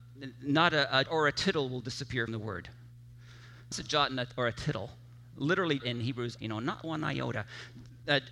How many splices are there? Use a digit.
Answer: 6